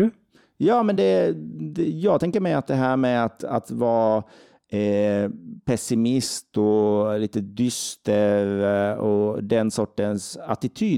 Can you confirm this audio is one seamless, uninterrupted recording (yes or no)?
yes